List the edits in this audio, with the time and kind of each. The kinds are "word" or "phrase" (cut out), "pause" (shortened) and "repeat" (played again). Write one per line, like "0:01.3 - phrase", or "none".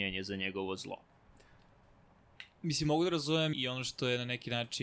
0:03.5 - word

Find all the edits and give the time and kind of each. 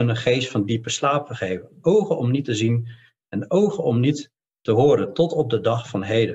none

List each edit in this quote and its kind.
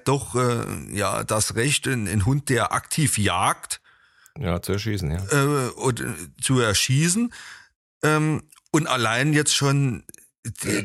none

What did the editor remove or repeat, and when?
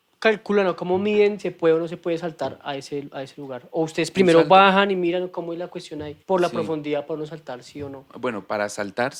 0:01.4 - word
0:06.2 - pause
0:08.1 - pause

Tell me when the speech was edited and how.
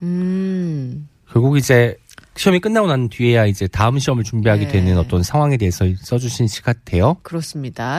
none

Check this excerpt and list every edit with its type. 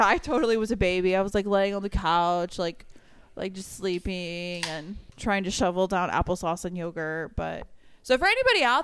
0:05.1 - pause

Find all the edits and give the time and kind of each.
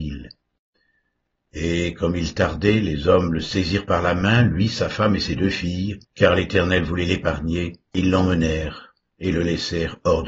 0:06.0 - pause
0:07.8 - pause

